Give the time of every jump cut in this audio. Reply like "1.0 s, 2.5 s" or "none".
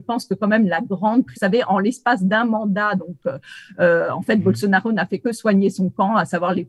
1.3 s